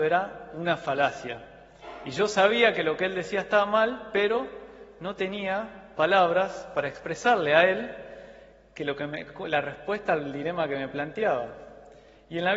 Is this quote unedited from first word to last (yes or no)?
yes